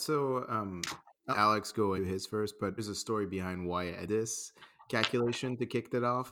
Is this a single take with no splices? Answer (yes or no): no